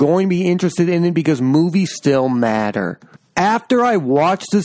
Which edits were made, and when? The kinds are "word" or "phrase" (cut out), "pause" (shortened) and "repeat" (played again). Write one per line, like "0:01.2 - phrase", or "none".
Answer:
0:01.9 - word